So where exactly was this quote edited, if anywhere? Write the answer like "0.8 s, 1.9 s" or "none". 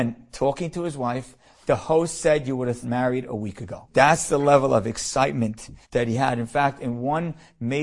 2.8 s, 5.8 s